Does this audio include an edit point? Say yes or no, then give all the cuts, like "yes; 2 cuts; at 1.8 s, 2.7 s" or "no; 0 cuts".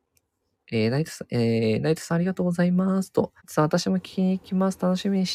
yes; 1 cut; at 3.4 s